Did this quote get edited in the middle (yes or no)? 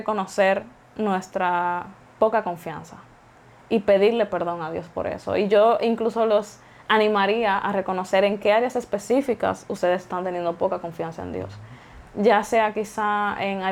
no